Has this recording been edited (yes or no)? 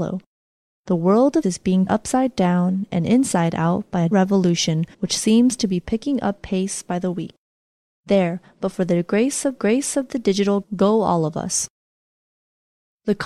yes